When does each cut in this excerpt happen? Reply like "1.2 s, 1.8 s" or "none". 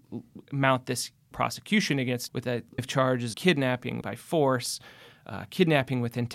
1.3 s, 2.3 s, 2.8 s, 3.3 s, 4.0 s